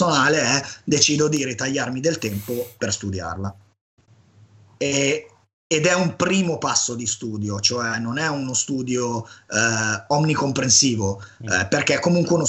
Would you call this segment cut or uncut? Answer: uncut